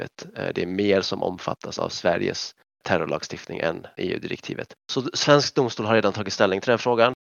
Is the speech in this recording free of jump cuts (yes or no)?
yes